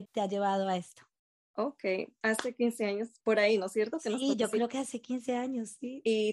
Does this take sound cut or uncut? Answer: uncut